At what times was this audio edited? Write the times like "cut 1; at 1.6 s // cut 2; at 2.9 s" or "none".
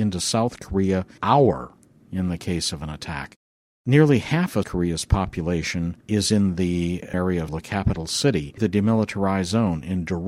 cut 1; at 1.2 s // cut 2; at 4.6 s // cut 3; at 6.0 s // cut 4; at 7.1 s // cut 5; at 7.5 s // cut 6; at 8.6 s